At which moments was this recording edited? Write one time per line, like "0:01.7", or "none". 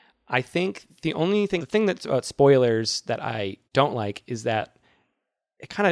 0:01.6
0:03.6